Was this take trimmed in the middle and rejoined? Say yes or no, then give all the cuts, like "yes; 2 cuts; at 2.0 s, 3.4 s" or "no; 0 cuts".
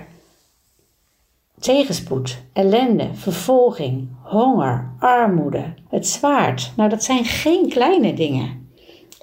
yes; 1 cut; at 5.9 s